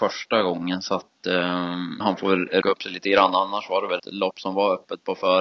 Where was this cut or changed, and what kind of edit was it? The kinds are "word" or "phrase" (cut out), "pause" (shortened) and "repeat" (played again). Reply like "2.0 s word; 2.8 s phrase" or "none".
2.0 s word; 2.6 s word; 4.0 s word